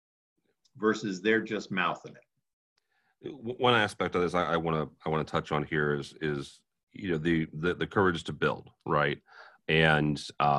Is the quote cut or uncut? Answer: uncut